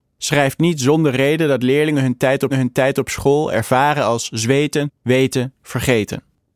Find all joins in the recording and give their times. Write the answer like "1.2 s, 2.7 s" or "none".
2.5 s, 5.0 s